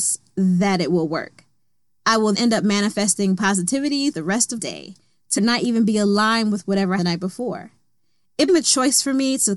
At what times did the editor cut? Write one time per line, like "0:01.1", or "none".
0:02.3
0:04.1
0:04.6
0:05.4
0:07.0
0:08.5